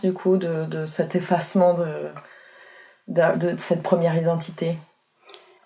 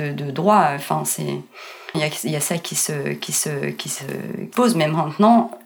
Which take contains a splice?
second; 3 cuts; at 1.9 s, 3.3 s, 4.5 s

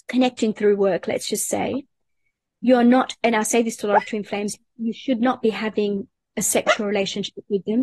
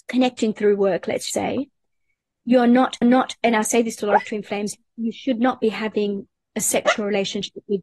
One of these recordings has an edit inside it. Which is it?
second; 2 cuts; at 1.3 s, 3.0 s

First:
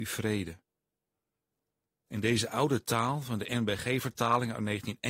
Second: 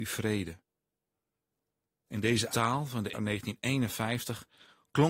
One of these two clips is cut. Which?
second; 2 cuts; at 2.5 s, 3.1 s

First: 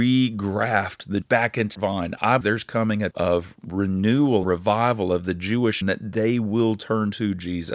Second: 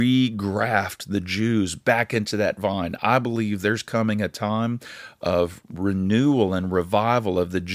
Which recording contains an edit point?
first; 6 cuts; at 1.2 s, 1.7 s, 2.4 s, 3.1 s, 4.4 s, 5.8 s

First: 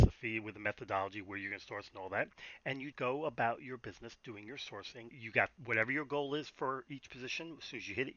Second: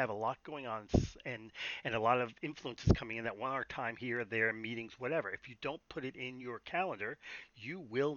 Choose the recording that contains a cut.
first; 3 cuts; at 2.9 s, 5.1 s, 5.6 s

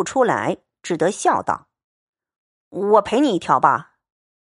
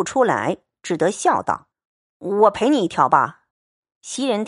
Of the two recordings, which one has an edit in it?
second; 2 cuts; at 1.7 s, 3.5 s

